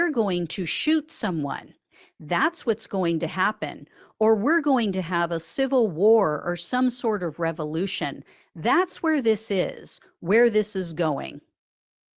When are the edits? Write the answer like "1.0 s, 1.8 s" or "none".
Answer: none